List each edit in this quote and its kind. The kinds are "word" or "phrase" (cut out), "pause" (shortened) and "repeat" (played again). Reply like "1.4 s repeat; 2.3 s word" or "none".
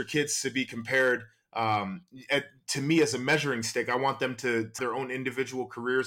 4.8 s word